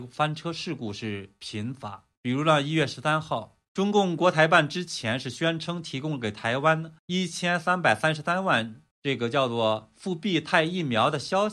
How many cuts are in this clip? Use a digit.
4